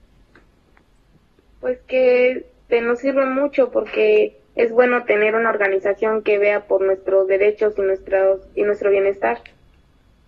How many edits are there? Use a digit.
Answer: 0